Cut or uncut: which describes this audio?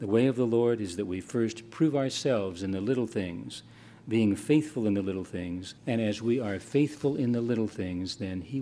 cut